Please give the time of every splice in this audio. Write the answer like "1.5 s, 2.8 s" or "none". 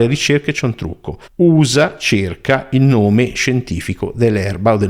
1.3 s